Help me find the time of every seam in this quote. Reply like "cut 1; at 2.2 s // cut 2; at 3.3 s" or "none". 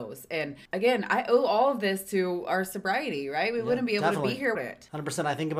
cut 1; at 4.5 s